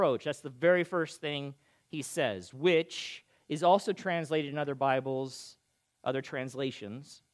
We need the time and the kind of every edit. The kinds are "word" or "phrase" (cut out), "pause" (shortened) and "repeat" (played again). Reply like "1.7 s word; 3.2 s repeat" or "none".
none